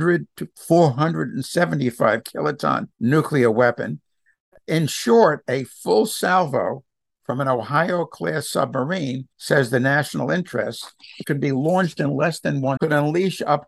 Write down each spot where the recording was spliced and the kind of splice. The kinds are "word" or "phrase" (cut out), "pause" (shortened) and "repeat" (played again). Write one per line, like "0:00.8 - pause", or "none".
0:02.9 - pause
0:09.3 - pause
0:11.2 - word
0:12.8 - word

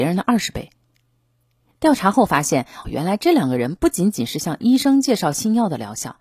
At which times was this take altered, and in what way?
0:02.8 - word

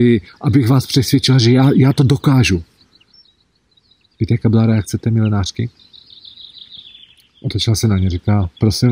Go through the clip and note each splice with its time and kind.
none

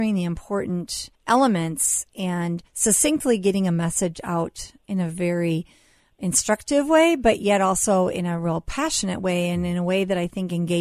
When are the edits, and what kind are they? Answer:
0:01.1 - pause
0:02.7 - pause

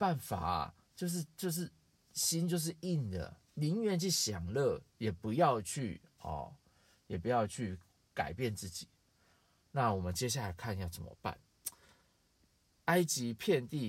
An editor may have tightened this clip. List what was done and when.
0:03.5 - pause
0:04.9 - pause

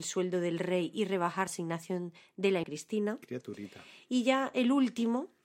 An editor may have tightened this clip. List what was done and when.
0:01.5 - word
0:02.6 - word

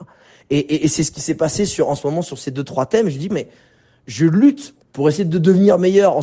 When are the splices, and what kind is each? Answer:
0:03.3 - word
0:04.8 - pause

